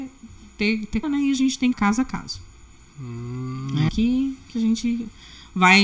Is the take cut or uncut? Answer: cut